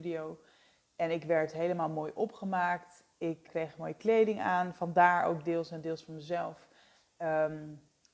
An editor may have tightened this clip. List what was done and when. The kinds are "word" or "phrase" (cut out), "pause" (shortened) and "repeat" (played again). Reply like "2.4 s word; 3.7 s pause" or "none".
3.5 s word